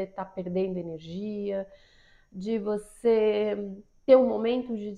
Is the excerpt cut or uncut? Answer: uncut